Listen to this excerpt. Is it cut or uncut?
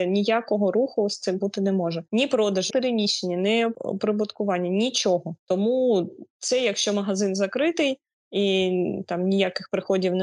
cut